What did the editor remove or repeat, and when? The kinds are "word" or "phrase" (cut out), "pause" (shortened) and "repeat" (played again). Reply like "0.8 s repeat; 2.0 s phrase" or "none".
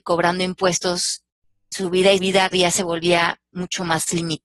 1.7 s word; 2.2 s word; 2.5 s word